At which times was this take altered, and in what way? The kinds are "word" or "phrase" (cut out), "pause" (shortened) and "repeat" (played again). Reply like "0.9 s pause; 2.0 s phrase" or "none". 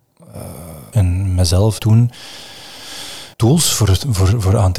0.9 s word; 1.8 s word; 3.3 s pause